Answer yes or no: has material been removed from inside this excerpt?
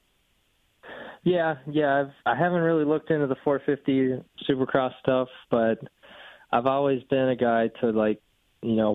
yes